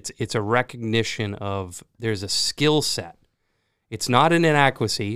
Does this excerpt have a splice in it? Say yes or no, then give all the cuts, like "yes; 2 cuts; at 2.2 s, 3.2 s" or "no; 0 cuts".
no; 0 cuts